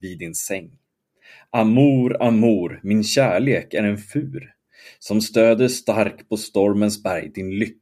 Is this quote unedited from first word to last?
yes; 0 cuts

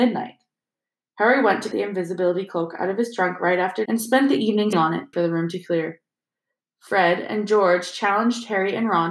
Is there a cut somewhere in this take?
yes; 4 cuts; at 1.7 s, 3.9 s, 4.7 s, 5.1 s

